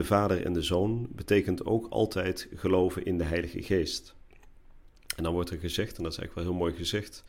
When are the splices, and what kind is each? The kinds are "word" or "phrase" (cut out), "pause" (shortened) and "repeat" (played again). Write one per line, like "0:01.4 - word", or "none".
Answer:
none